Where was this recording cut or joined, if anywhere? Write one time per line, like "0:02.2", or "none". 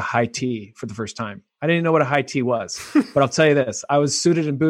none